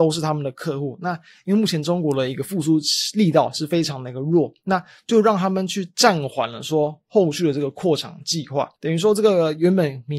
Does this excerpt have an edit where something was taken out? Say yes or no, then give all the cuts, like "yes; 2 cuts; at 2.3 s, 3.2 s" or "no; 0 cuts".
yes; 1 cut; at 8.7 s